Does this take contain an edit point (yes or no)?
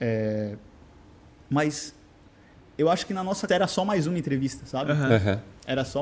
yes